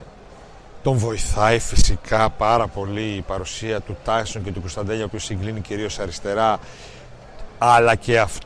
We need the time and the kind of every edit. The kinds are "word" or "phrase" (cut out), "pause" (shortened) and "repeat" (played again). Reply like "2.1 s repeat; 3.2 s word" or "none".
none

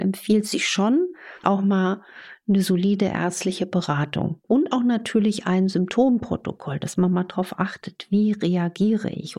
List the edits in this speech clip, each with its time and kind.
1.4 s word; 4.4 s pause

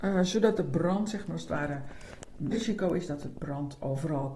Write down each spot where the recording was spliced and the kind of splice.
2.5 s word

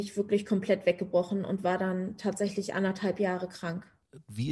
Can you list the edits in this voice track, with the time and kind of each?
none

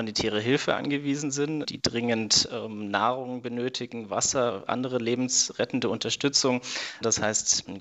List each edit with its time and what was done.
none

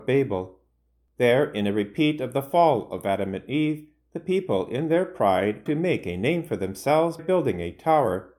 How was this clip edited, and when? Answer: 5.7 s word; 7.2 s word

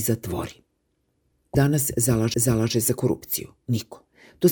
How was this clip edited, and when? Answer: 1.5 s word; 2.3 s repeat

